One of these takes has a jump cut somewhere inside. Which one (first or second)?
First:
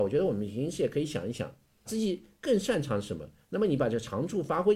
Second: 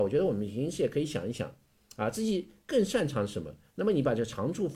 first